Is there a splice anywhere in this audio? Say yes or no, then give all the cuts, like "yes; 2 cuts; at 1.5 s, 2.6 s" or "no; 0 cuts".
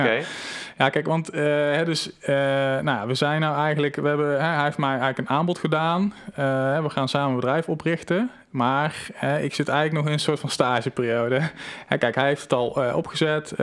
no; 0 cuts